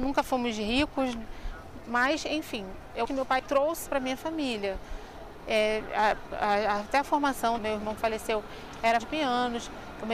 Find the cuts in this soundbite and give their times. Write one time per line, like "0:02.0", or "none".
0:01.8
0:03.0
0:03.4
0:03.9
0:07.6
0:08.0
0:09.0